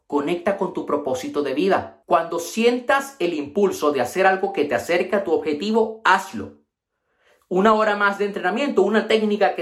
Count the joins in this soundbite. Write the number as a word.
zero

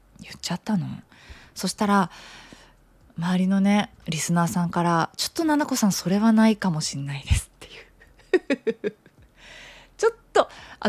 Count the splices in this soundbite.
one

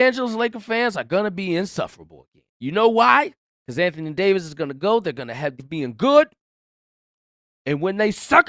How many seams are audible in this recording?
three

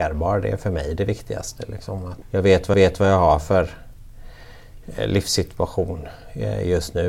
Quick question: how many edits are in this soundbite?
two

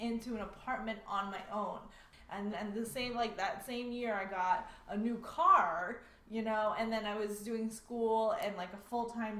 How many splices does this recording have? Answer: one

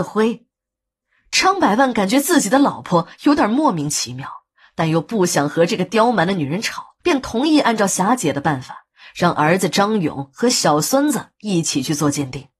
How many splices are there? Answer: one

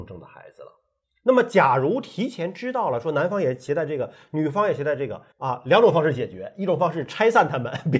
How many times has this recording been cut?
one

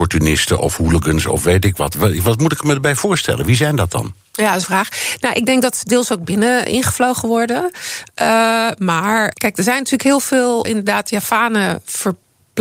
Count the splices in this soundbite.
four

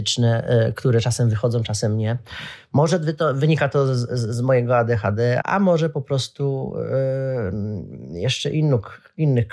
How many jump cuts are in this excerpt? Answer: one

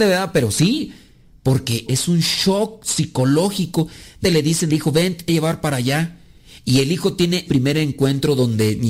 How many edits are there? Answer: five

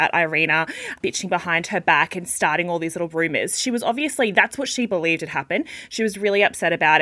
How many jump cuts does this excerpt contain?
zero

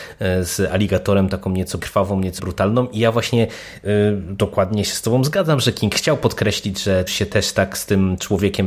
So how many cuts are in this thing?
three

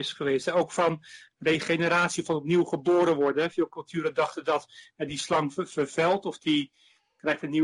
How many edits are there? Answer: zero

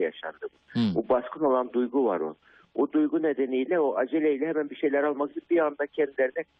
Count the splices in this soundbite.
zero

